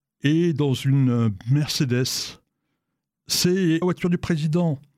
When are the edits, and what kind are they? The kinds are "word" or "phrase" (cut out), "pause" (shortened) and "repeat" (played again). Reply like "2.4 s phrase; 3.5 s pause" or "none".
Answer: 3.8 s word

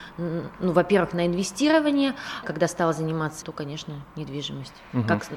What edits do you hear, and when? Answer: 2.4 s phrase; 3.4 s word

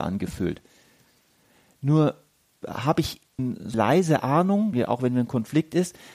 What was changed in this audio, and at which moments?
2.6 s word; 3.4 s word; 3.7 s word; 4.7 s word

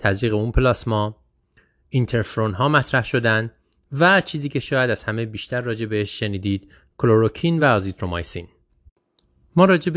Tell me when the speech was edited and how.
none

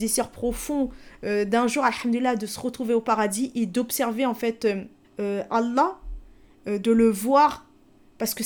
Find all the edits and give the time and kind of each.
5.0 s pause

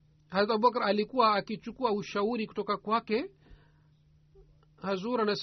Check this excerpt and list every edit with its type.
none

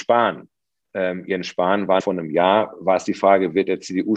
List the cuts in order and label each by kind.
2.0 s word

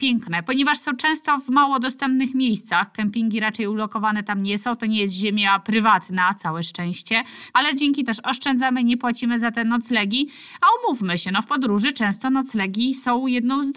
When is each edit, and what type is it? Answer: 8.1 s word

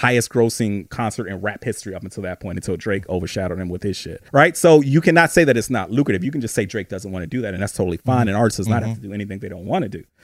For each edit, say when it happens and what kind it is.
4.3 s pause

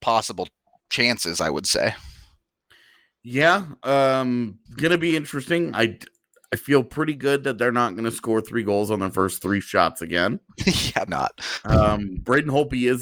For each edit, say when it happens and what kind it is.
4.7 s pause; 11.1 s word

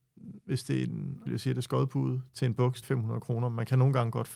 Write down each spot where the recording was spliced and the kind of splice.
1.3 s word; 2.3 s word; 2.8 s word

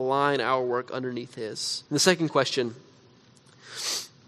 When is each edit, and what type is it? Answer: 1.9 s pause

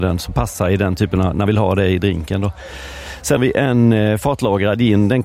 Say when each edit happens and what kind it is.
1.5 s word; 3.4 s word

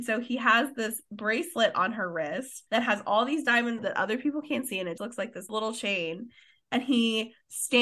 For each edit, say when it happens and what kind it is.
2.7 s pause; 3.8 s phrase; 5.0 s word; 5.5 s word

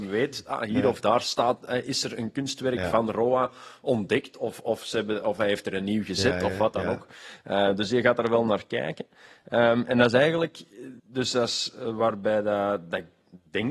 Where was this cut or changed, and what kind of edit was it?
11.0 s pause

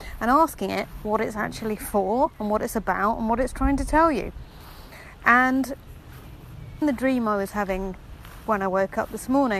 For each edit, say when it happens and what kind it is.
6.8 s word

